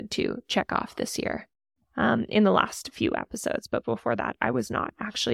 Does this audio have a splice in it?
no; 0 cuts

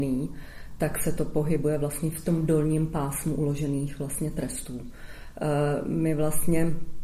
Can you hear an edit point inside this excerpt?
no; 0 cuts

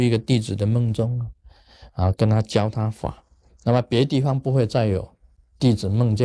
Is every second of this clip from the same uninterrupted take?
no; 1 cut; at 3.5 s

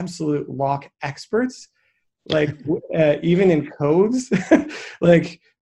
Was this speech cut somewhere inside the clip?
no; 0 cuts

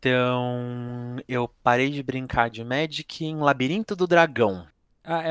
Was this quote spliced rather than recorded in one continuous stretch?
no; 0 cuts

